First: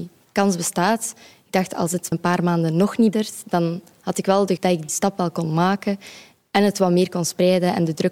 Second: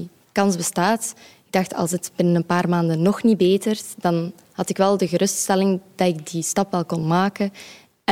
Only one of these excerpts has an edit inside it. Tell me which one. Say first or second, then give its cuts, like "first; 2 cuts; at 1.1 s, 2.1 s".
first; 4 cuts; at 2.1 s, 3.1 s, 4.6 s, 4.9 s